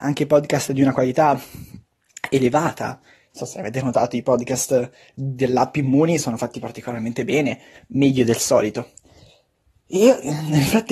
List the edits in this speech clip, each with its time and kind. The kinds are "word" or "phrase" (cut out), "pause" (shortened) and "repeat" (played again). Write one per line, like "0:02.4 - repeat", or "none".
none